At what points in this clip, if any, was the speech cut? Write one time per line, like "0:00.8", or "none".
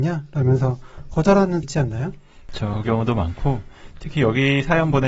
0:01.6
0:02.8